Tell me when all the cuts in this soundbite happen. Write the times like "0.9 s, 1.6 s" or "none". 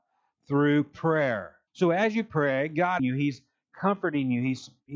1.7 s, 3.0 s

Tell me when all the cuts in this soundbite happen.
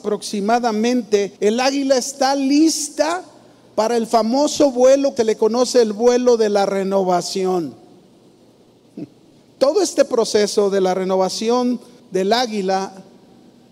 1.4 s, 5.2 s, 9.3 s, 12.0 s

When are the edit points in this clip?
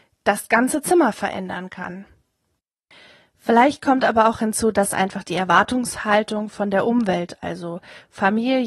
none

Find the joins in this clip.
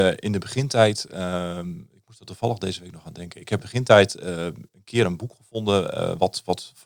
3.6 s, 4.7 s

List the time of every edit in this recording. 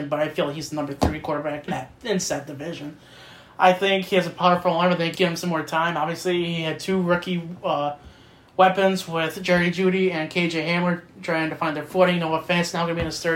1.7 s, 5.1 s

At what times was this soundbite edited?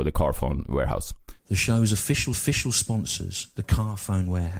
1.4 s, 2.3 s

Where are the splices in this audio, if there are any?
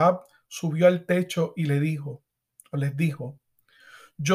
none

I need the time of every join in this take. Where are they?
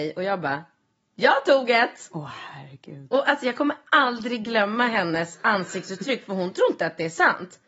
none

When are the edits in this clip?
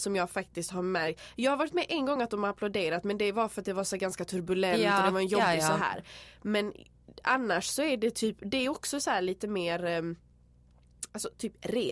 none

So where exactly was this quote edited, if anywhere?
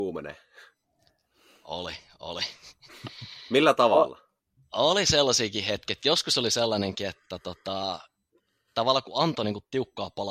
none

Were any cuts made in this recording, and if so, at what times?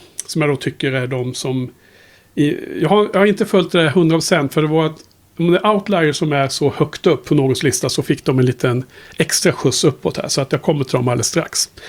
none

